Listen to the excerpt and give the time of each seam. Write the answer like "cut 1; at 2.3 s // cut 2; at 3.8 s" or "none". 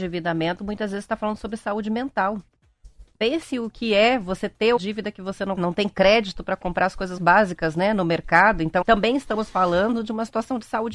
cut 1; at 4.8 s // cut 2; at 5.6 s // cut 3; at 7.2 s // cut 4; at 8.8 s